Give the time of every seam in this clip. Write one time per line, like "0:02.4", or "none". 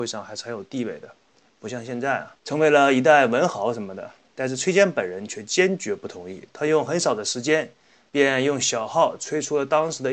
0:02.4